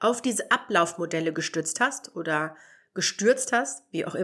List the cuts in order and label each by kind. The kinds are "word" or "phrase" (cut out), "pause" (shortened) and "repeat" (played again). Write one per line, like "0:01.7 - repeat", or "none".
none